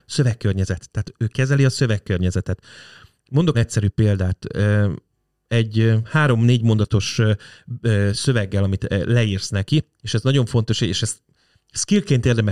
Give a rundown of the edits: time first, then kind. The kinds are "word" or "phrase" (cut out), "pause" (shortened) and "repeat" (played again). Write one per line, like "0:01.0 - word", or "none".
0:01.2 - word
0:03.5 - phrase

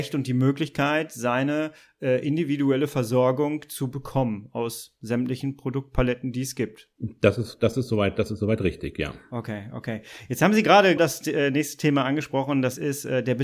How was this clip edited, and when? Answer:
0:11.0 - word

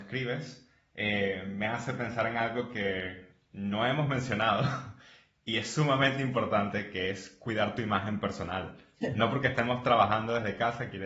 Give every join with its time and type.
none

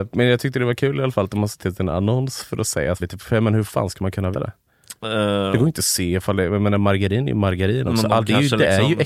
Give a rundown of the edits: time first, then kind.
0:01.6 - word
0:03.0 - phrase
0:04.3 - word

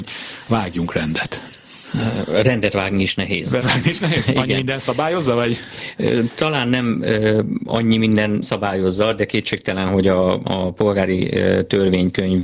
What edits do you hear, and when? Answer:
0:03.6 - word
0:08.4 - word

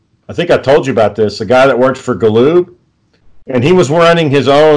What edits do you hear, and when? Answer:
none

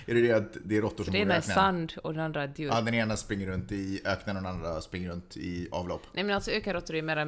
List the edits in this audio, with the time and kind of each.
none

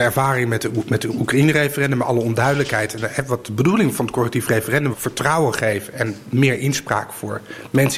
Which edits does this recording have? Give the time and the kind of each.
0:04.9 - word

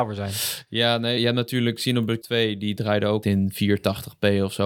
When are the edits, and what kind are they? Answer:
0:01.2 - word
0:02.2 - word
0:03.2 - word

